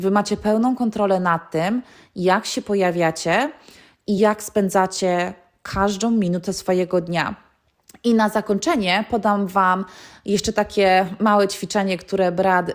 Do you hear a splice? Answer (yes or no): no